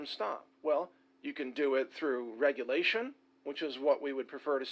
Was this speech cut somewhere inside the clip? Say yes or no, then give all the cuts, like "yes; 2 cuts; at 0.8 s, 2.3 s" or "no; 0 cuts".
no; 0 cuts